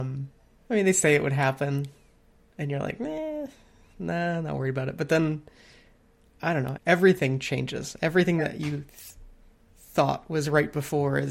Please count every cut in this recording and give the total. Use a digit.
1